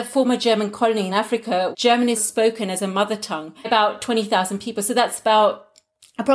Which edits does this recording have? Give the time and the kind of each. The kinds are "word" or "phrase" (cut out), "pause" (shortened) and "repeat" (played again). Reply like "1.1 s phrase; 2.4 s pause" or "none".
1.1 s word; 1.7 s word; 2.2 s word; 3.6 s word